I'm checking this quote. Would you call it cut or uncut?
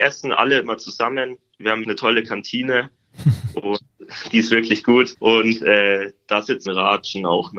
cut